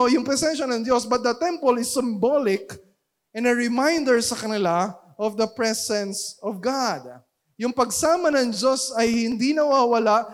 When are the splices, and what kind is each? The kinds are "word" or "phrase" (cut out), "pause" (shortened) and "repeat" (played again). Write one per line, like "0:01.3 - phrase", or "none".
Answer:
none